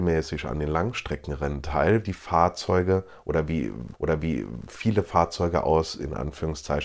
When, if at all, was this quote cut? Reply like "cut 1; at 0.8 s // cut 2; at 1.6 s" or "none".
cut 1; at 2.0 s // cut 2; at 3.9 s